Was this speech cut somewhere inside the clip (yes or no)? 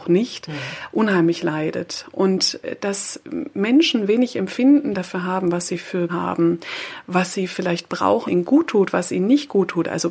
yes